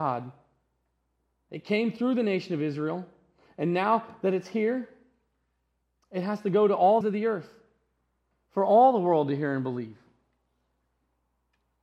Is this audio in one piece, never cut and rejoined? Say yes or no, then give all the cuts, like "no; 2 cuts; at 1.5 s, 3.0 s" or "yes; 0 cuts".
no; 1 cut; at 7.0 s